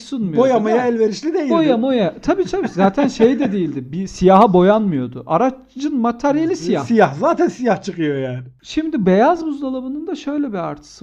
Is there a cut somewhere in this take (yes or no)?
no